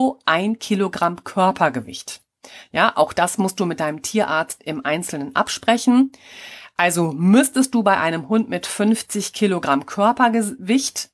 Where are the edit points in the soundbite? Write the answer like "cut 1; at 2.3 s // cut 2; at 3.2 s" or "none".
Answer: none